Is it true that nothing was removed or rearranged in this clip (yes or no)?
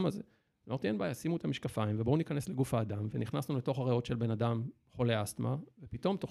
yes